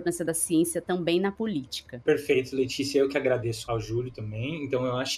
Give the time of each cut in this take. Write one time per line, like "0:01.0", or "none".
0:03.7

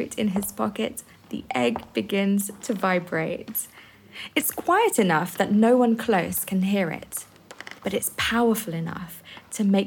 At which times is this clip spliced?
0:07.8

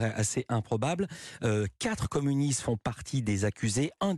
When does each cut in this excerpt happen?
none

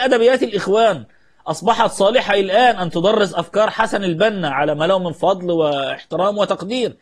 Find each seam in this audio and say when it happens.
none

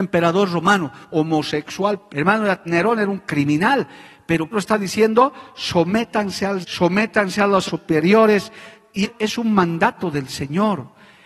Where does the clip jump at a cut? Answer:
0:02.1
0:02.7
0:04.5
0:06.6
0:07.7
0:09.0

